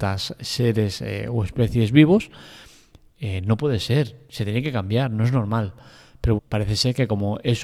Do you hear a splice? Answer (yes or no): yes